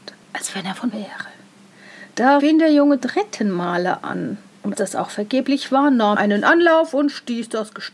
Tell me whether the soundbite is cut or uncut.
cut